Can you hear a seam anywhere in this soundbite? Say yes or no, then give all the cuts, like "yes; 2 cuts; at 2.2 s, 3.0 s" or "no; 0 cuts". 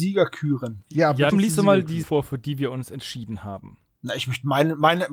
yes; 2 cuts; at 1.3 s, 2.0 s